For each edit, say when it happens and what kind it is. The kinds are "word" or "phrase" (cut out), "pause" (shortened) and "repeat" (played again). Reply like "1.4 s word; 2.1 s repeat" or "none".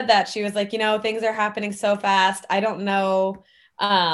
none